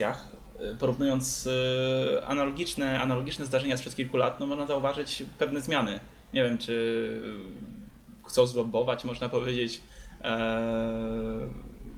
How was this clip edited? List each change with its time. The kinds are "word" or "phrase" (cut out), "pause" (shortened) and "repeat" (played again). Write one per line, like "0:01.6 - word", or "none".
none